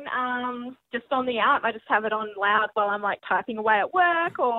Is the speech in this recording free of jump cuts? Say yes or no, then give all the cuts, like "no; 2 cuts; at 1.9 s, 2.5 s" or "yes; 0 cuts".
yes; 0 cuts